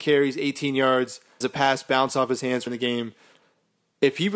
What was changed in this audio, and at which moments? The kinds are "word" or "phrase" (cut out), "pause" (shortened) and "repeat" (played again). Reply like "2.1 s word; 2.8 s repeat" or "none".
1.4 s word; 2.7 s phrase